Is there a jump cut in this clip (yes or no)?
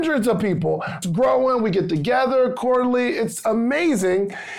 yes